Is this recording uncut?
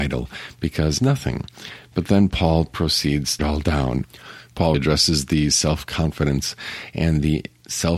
no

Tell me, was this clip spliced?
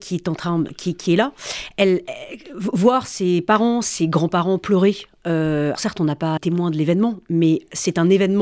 yes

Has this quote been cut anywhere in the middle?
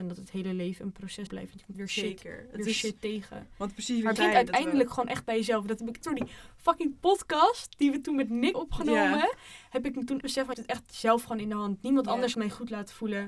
yes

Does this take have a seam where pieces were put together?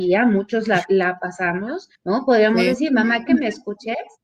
yes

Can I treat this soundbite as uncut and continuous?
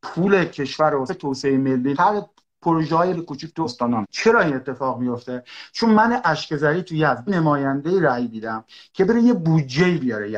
no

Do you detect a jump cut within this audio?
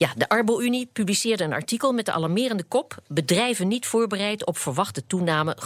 no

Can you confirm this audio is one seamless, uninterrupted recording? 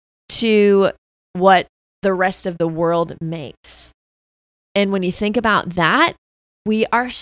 yes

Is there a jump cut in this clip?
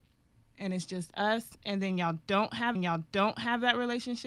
yes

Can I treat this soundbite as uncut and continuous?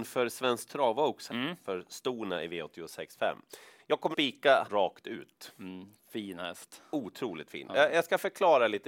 no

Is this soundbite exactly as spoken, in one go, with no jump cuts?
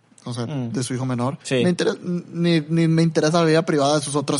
no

